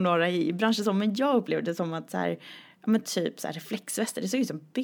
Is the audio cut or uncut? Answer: uncut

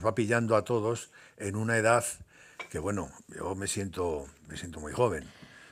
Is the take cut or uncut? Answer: uncut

